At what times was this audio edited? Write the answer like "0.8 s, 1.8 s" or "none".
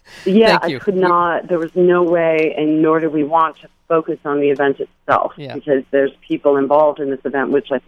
none